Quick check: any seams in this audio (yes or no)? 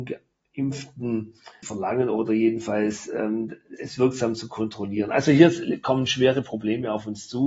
yes